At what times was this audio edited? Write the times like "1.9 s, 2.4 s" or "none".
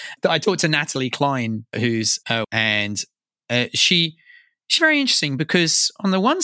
2.4 s, 4.8 s